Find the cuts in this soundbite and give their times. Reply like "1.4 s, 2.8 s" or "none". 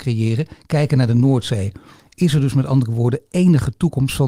none